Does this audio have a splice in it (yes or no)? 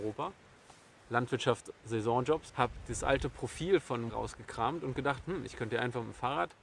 yes